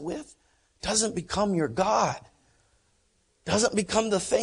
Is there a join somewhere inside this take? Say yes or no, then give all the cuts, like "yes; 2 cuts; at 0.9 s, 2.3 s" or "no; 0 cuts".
no; 0 cuts